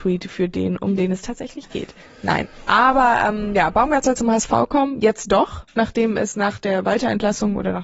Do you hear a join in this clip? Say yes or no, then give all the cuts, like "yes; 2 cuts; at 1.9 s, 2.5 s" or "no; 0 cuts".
no; 0 cuts